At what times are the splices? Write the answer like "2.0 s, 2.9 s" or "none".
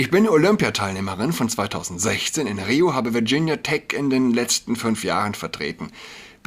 none